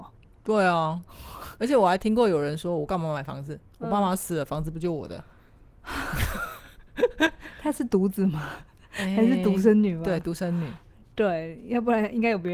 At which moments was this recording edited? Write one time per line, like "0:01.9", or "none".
none